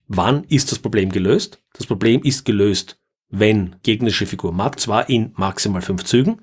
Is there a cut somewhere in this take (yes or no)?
yes